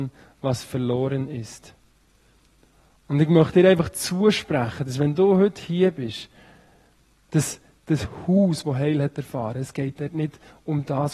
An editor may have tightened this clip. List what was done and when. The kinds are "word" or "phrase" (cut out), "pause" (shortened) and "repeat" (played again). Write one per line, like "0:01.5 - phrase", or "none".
none